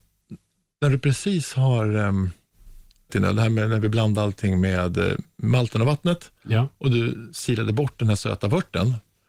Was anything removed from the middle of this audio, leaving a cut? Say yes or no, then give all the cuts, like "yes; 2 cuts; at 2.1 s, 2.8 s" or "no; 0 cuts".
yes; 1 cut; at 3.1 s